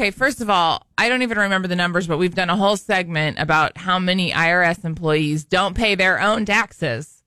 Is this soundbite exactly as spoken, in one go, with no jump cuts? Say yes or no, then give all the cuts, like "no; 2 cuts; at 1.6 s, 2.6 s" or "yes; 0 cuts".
no; 1 cut; at 0.9 s